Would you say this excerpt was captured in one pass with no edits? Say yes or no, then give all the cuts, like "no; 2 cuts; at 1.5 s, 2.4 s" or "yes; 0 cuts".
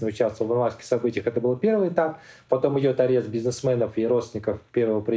yes; 0 cuts